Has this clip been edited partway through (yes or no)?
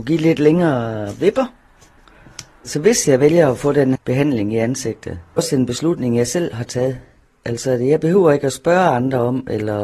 yes